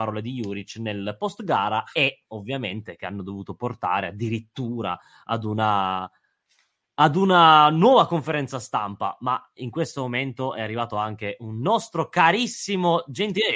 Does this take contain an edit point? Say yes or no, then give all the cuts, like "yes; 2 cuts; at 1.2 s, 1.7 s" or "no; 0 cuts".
no; 0 cuts